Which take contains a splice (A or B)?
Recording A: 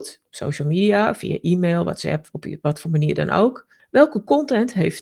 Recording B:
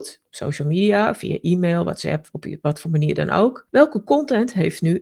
B